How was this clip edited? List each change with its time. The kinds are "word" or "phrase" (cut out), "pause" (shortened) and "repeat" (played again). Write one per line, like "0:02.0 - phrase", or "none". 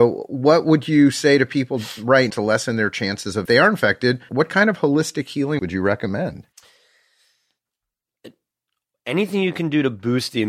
0:02.3 - word
0:03.5 - phrase
0:04.3 - word
0:05.6 - word